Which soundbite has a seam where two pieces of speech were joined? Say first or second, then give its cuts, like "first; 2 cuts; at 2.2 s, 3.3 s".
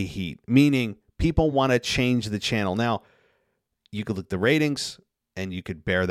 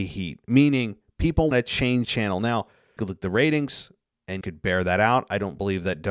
second; 4 cuts; at 1.5 s, 2.0 s, 3.0 s, 4.4 s